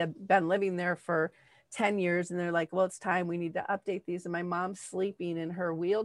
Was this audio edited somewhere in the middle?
no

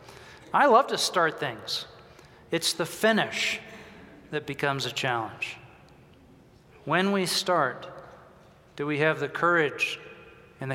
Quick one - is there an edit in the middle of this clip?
no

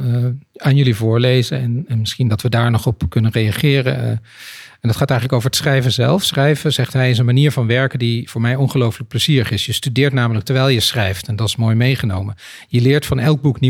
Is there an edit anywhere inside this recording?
no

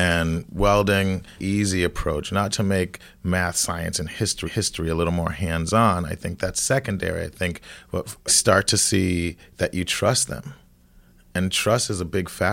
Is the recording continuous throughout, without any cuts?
no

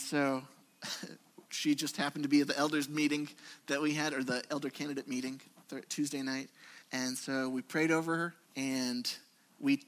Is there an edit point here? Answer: yes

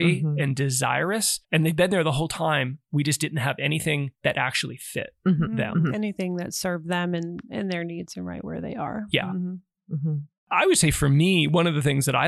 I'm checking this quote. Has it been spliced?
yes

